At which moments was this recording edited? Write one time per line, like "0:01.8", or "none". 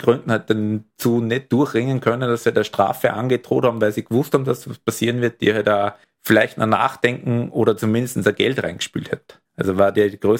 0:00.9
0:06.0
0:09.5

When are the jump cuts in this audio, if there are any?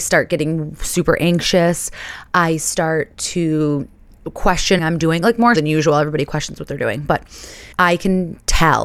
0:04.8
0:05.6
0:07.7

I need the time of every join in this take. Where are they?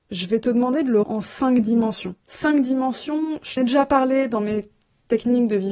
0:01.0
0:02.2
0:03.6

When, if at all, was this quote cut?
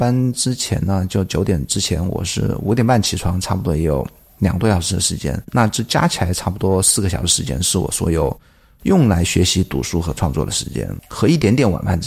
none

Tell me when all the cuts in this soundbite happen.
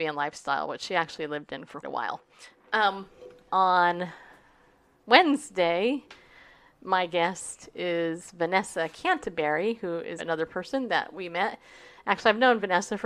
0:01.8
0:03.5
0:10.2

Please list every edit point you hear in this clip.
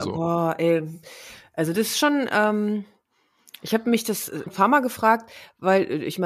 0:04.5

